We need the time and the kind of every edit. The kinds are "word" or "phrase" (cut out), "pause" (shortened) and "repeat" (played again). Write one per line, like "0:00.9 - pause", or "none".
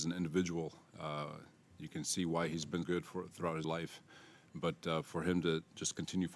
0:02.8 - word
0:03.6 - word